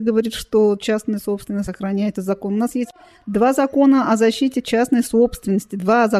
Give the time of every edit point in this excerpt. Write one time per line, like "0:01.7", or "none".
none